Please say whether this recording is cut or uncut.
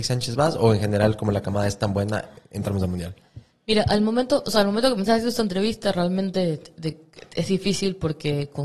uncut